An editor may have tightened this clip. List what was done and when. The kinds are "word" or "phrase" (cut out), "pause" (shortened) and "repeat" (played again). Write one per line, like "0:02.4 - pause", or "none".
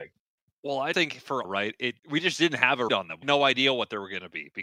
0:00.9 - word
0:01.4 - word
0:02.0 - pause
0:02.9 - word
0:03.2 - word

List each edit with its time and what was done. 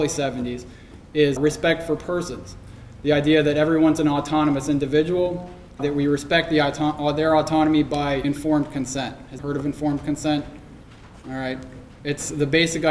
0:01.4 - word
0:05.8 - word
0:08.2 - word
0:09.4 - word

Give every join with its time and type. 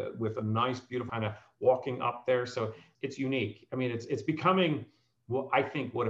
0:01.1 - phrase

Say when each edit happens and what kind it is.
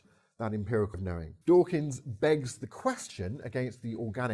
0:00.9 - word
0:01.4 - pause

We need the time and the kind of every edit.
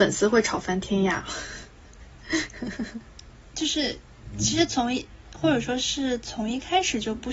0:02.1 - pause

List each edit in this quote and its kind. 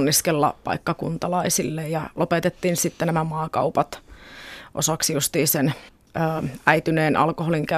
0:05.9 - pause

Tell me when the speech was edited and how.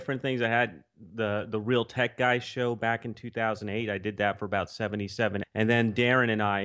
0:05.4 - word

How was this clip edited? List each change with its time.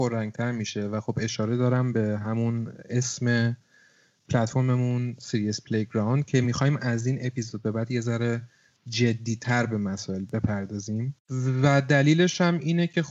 none

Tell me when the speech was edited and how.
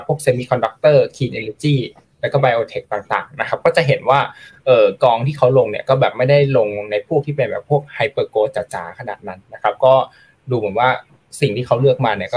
none

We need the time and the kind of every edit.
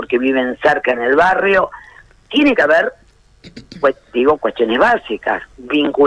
none

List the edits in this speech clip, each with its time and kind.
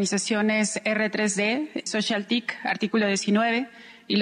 0:01.9 - word

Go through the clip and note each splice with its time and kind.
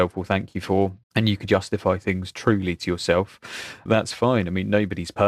0:01.0 - pause
0:01.4 - word
0:03.9 - word

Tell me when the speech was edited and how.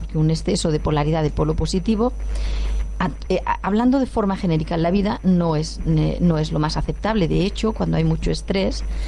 none

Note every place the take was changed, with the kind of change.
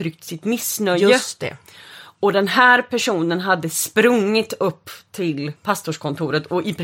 0:05.6 - pause

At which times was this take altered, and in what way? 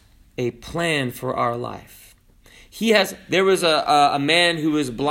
none

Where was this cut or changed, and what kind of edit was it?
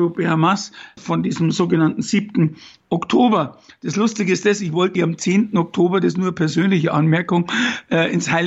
0:01.0 - word
0:05.0 - word

